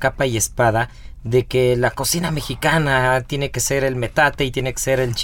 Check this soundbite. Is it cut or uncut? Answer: uncut